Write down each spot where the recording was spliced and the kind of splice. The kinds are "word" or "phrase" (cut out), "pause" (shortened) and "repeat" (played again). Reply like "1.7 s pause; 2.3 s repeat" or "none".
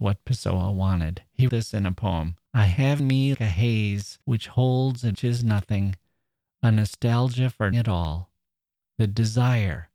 1.5 s word; 2.5 s pause; 3.0 s word; 3.3 s word; 4.2 s pause; 5.1 s word; 7.7 s word